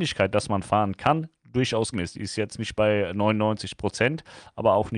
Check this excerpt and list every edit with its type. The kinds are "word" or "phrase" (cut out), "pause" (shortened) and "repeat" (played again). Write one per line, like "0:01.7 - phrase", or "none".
0:01.9 - word